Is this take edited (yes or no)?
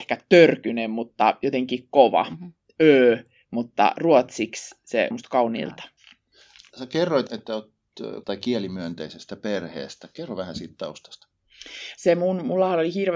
yes